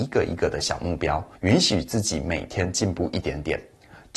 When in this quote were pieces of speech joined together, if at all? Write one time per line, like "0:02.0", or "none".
0:01.4